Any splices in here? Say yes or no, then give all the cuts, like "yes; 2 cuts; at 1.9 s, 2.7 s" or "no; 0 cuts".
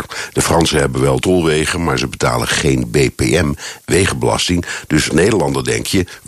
yes; 3 cuts; at 1.2 s, 3.8 s, 5.1 s